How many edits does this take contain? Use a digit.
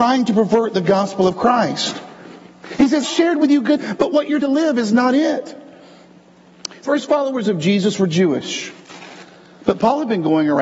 4